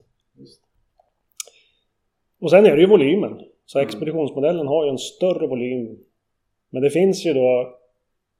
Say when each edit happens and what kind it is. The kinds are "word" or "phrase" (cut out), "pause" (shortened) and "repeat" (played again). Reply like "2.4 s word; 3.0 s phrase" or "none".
none